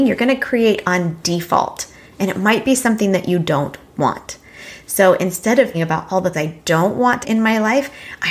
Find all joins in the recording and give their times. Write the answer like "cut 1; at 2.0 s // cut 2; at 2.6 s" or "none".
cut 1; at 5.7 s // cut 2; at 6.3 s // cut 3; at 7.2 s